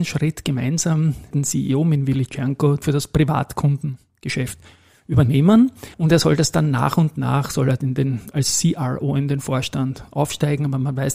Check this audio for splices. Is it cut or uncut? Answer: cut